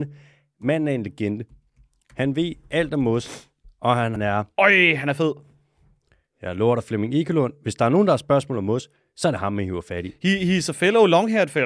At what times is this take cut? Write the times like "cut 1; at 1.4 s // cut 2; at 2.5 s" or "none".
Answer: cut 1; at 4.2 s